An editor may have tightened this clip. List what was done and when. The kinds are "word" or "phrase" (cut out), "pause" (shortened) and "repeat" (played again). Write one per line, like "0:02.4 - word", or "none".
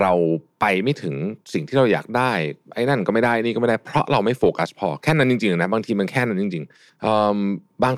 0:02.6 - pause
0:06.9 - pause

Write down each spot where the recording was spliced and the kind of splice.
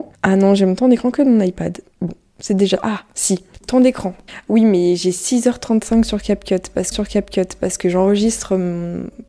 0:03.5 - pause
0:06.9 - repeat

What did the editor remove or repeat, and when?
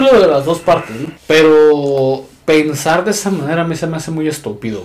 0:01.2 - pause

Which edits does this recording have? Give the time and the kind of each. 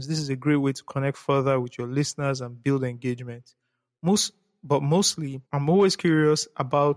0:05.5 - pause

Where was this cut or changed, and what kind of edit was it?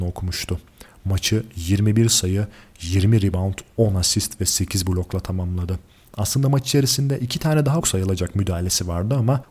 0:07.8 - word

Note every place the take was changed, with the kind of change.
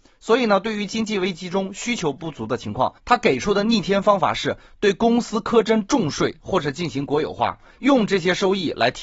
0:03.0 - pause

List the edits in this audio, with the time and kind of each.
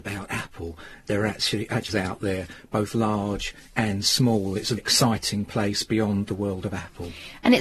0:01.9 - phrase
0:04.8 - word

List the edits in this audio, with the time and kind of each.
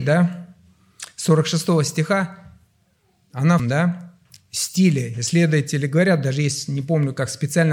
0:03.6 - phrase

